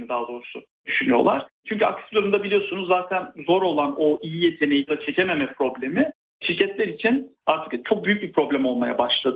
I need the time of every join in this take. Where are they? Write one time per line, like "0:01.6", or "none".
0:04.9